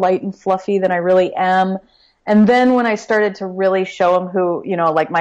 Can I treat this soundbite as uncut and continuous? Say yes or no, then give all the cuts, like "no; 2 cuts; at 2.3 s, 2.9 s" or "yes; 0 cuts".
yes; 0 cuts